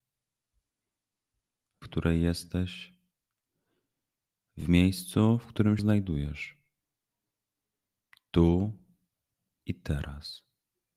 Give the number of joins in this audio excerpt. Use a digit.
2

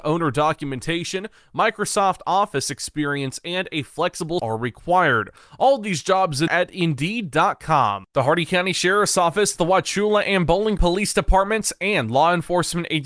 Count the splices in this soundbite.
3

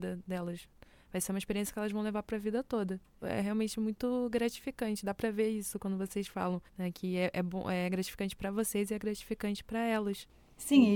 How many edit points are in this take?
2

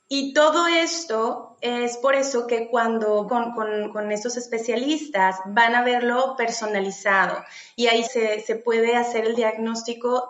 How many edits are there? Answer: 2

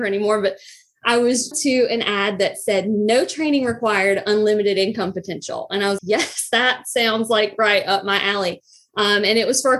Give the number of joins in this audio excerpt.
2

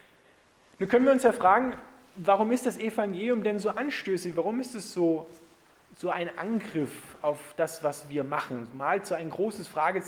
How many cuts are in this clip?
0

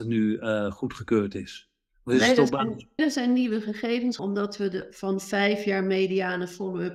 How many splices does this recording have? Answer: 2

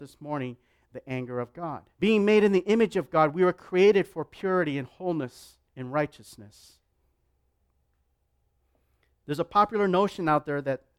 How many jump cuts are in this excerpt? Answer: 2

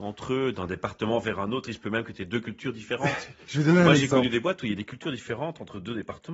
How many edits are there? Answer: 0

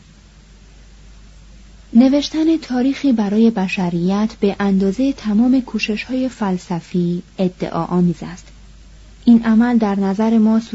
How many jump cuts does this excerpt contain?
0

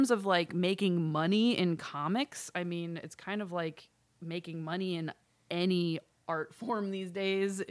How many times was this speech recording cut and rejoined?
0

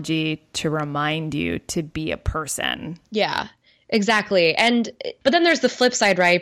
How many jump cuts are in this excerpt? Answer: 1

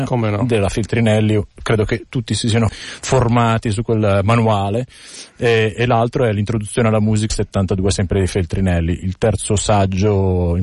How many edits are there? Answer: 3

